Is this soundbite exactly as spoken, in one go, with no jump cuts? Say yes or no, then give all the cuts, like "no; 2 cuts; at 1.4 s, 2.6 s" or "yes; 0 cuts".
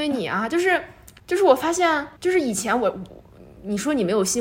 no; 2 cuts; at 1.2 s, 2.2 s